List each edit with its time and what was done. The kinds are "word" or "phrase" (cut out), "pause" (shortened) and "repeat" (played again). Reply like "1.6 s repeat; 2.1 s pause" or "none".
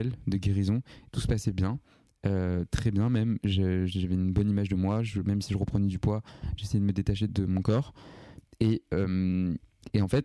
7.3 s word